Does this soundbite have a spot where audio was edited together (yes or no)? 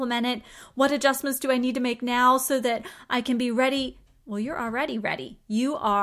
no